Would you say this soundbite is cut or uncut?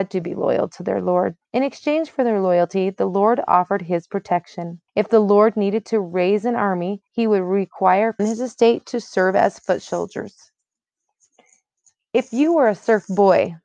cut